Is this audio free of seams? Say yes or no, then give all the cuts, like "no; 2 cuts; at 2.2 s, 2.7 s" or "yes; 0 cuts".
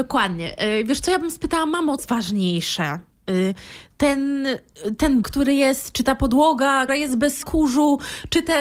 no; 4 cuts; at 2.0 s, 5.2 s, 6.9 s, 7.4 s